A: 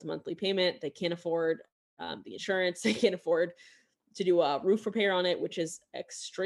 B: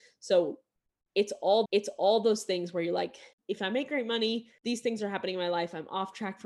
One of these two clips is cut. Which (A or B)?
B